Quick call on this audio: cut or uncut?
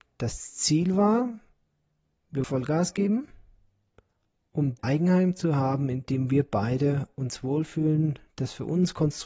cut